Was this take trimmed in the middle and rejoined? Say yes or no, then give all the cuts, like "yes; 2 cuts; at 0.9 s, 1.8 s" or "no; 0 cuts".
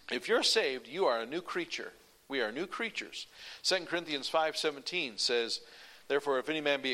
no; 0 cuts